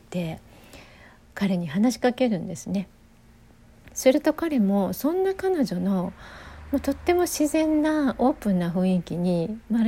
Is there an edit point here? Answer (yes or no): no